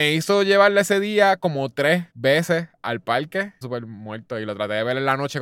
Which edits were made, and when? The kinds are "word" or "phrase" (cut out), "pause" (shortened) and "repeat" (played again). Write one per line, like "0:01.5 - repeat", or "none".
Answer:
0:02.1 - pause
0:03.6 - phrase